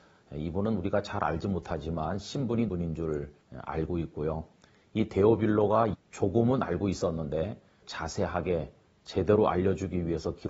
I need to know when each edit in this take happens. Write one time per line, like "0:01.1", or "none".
0:02.7
0:03.4
0:05.9
0:07.8